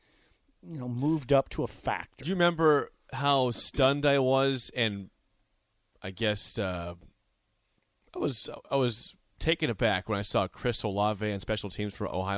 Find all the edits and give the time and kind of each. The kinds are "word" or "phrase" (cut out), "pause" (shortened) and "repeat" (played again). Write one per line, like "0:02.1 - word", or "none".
none